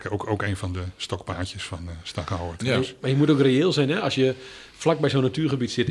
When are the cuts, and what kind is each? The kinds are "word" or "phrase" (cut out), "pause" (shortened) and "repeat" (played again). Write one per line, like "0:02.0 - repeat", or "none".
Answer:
none